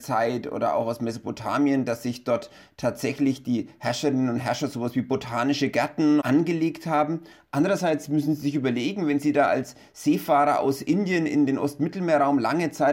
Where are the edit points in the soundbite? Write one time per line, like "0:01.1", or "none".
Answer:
none